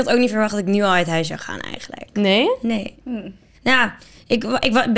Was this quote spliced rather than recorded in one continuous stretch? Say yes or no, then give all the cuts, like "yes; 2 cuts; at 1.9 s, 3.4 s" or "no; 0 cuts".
no; 0 cuts